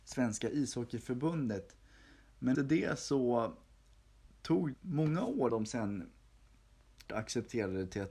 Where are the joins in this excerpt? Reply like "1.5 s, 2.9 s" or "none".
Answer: 2.5 s, 4.7 s, 5.5 s, 7.1 s